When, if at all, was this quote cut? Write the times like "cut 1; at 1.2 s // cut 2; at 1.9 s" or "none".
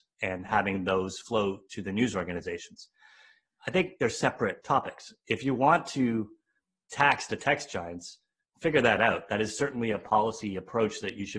cut 1; at 1.2 s